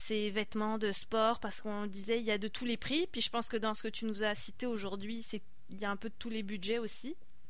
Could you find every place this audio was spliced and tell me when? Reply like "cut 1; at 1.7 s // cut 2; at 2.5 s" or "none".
none